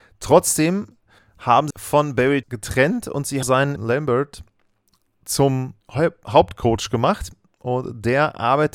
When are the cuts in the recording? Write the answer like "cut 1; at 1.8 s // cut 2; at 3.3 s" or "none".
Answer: cut 1; at 1.2 s // cut 2; at 1.7 s // cut 3; at 2.4 s // cut 4; at 3.4 s // cut 5; at 3.8 s // cut 6; at 5.8 s